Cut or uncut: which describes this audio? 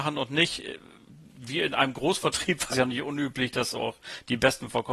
cut